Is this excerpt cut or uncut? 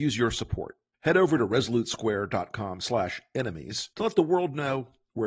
cut